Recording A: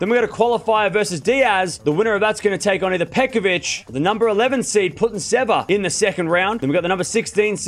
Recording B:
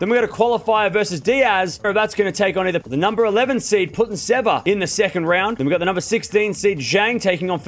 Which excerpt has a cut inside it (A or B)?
B